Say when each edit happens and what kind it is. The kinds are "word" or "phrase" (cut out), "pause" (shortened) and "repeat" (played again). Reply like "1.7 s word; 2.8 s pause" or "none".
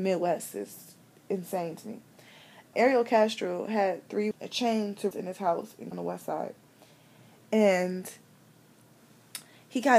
2.7 s word; 4.3 s word; 5.1 s word; 5.9 s word